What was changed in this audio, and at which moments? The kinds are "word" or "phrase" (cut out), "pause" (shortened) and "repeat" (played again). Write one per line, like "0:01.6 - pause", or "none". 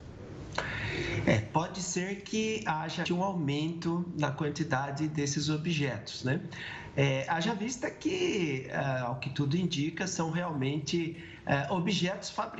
0:03.1 - word

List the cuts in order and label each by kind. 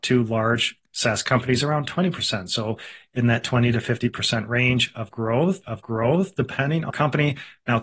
0:05.6 - repeat
0:06.9 - phrase

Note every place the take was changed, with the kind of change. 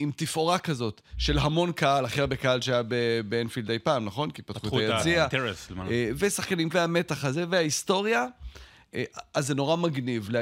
0:06.7 - word

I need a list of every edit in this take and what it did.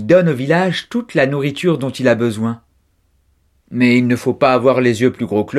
none

